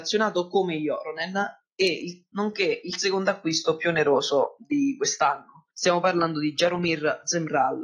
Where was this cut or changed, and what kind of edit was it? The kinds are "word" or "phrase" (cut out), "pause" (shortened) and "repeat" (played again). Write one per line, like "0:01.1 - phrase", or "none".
0:05.7 - pause